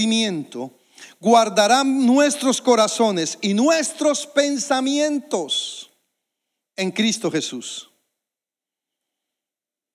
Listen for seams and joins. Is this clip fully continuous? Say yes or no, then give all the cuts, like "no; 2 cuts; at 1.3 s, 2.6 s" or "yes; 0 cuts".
yes; 0 cuts